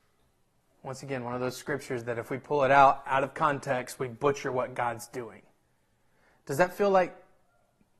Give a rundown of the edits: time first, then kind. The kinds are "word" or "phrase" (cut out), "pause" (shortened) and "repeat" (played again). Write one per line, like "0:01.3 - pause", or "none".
none